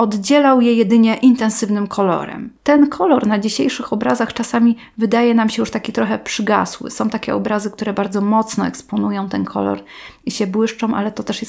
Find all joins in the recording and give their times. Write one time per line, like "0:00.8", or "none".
0:02.6